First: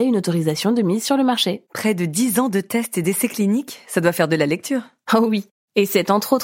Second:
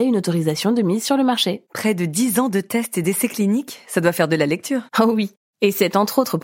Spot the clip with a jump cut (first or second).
second